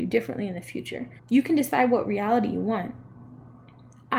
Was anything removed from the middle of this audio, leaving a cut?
yes; 1 cut; at 1.2 s

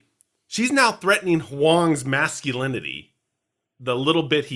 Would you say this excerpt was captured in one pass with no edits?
yes; 0 cuts

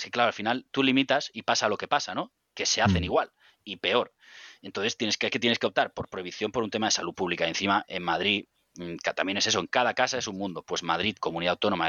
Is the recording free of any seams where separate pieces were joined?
yes; 0 cuts

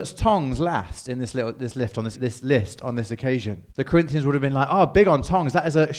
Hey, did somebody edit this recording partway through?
yes; 2 cuts; at 2.1 s, 3.7 s

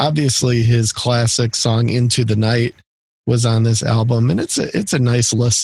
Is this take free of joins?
yes; 0 cuts

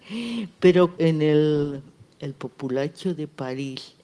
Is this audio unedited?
no; 1 cut; at 1.0 s

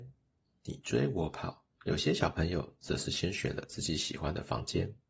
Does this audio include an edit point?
yes; 1 cut; at 1.7 s

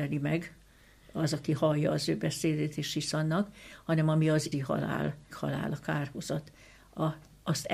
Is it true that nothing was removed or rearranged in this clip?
no; 2 cuts; at 4.5 s, 5.3 s

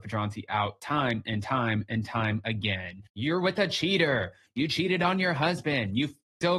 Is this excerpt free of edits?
no; 1 cut; at 3.1 s

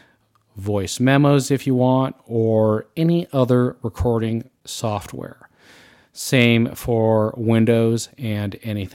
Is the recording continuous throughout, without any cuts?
yes; 0 cuts

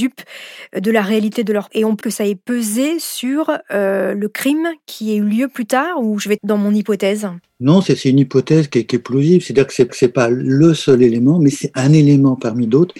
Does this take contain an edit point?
yes; 5 cuts; at 1.7 s, 2.0 s, 6.4 s, 7.4 s, 9.9 s

